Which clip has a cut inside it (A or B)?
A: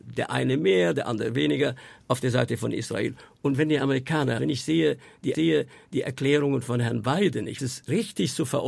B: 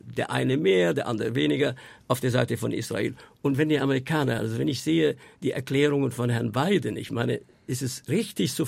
A